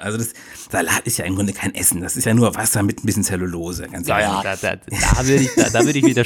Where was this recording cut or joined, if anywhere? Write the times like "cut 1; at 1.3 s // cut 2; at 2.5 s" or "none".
cut 1; at 4.4 s